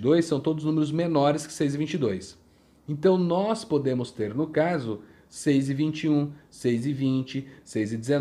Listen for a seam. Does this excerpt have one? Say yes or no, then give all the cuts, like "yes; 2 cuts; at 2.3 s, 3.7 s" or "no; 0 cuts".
no; 0 cuts